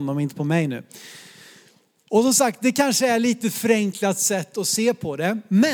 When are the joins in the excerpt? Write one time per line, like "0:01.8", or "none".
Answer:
none